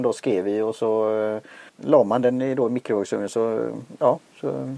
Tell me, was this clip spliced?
yes; 1 cut; at 1.7 s

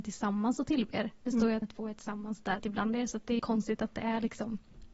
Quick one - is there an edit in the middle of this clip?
yes; 3 cuts; at 1.6 s, 2.6 s, 3.4 s

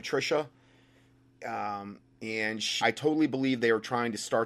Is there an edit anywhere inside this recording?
yes; 1 cut; at 2.8 s

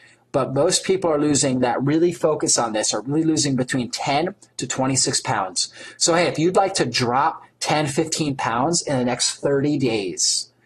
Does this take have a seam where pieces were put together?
no; 0 cuts

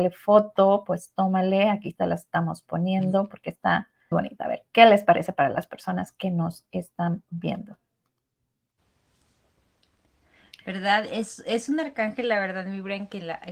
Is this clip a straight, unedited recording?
no; 1 cut; at 4.1 s

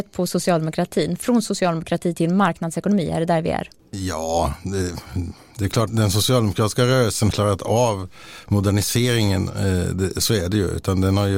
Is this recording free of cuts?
no; 2 cuts; at 5.9 s, 7.3 s

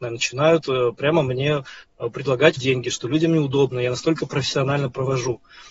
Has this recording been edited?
yes; 1 cut; at 2.6 s

